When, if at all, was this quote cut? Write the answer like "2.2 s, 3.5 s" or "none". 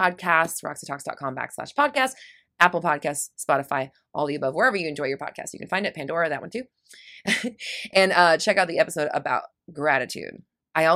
none